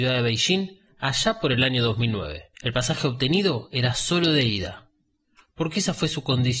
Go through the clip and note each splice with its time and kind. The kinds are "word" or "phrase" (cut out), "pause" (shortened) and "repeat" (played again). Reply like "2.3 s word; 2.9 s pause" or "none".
2.5 s pause